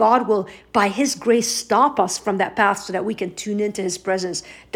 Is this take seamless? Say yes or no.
yes